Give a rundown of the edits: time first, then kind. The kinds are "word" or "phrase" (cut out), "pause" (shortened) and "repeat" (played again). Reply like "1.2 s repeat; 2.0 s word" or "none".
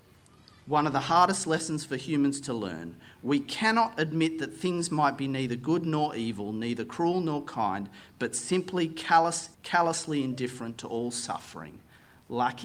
9.5 s pause

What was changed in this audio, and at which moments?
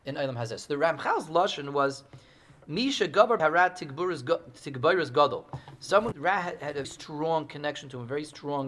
3.4 s word; 6.1 s word; 6.8 s word

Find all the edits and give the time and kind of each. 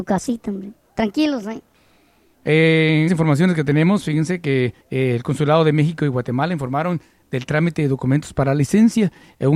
3.1 s word; 4.8 s pause

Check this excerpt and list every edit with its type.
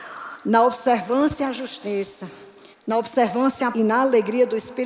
2.7 s pause; 3.7 s word

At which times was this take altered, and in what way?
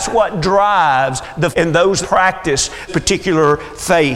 1.5 s word; 2.0 s word; 2.9 s word

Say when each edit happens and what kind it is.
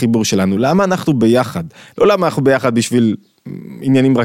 none

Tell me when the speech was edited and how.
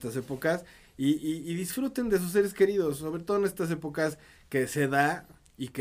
none

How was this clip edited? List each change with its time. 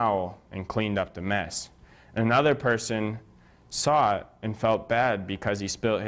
none

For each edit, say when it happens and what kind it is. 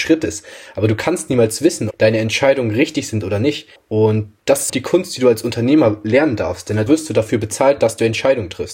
1.9 s word; 3.8 s pause; 4.7 s word; 6.9 s word

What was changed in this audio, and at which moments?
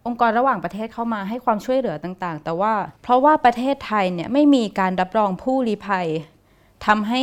3.0 s pause

